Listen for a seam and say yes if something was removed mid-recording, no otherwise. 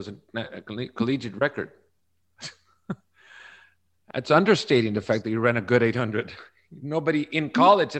no